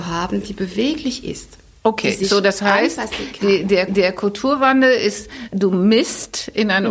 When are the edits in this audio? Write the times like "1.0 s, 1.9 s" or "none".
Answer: 3.9 s